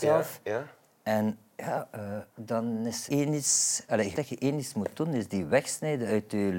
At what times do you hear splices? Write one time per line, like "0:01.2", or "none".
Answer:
0:02.3
0:03.1
0:04.1